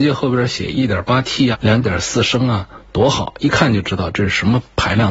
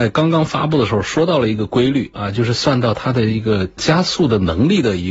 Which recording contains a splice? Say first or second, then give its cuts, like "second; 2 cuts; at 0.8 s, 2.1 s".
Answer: first; 1 cut; at 1.5 s